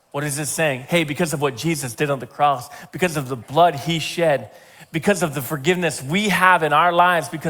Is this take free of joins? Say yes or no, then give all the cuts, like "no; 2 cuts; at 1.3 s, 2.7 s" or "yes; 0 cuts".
yes; 0 cuts